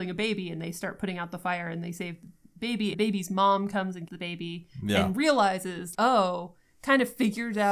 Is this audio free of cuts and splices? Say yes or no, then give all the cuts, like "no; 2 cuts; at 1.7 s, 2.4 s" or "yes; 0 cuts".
no; 3 cuts; at 2.9 s, 4.1 s, 5.9 s